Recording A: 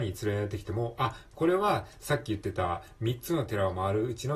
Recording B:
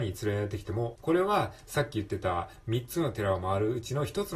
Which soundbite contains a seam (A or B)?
B